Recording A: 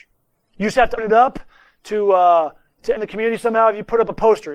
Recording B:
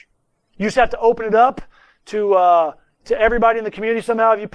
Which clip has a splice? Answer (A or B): A